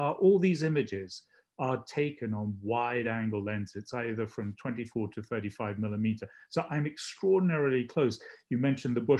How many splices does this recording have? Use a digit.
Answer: 0